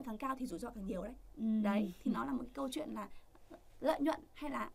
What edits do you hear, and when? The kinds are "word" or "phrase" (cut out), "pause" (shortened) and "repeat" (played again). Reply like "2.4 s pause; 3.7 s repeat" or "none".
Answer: none